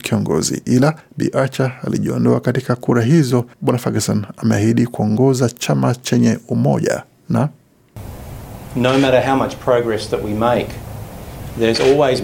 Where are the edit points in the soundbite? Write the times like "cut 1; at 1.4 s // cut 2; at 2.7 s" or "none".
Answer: cut 1; at 1.0 s // cut 2; at 3.5 s